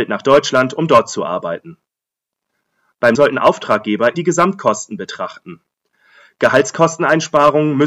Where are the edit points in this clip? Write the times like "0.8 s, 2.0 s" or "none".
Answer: 3.1 s, 4.1 s